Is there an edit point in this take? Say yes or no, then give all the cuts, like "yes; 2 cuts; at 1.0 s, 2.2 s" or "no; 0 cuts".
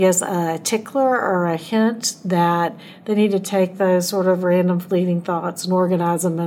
no; 0 cuts